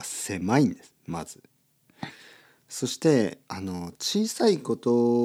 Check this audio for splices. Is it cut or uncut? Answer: uncut